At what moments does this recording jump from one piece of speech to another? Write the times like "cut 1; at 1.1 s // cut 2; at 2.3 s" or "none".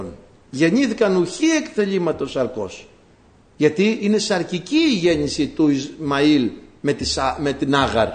none